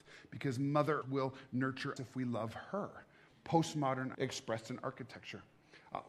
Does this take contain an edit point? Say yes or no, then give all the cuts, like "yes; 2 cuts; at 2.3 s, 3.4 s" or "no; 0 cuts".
yes; 3 cuts; at 1.0 s, 2.0 s, 4.1 s